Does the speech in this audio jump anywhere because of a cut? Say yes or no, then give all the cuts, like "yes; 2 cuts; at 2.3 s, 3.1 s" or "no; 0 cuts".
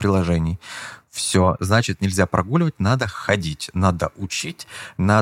no; 0 cuts